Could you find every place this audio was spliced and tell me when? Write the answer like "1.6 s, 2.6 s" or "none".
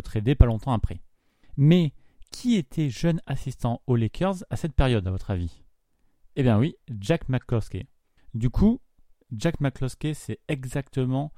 none